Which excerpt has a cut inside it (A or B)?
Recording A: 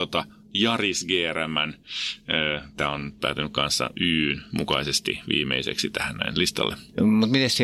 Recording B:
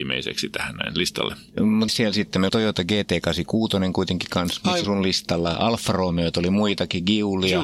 B